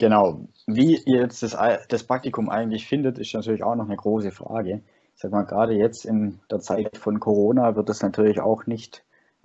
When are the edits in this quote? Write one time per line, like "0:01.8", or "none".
0:06.4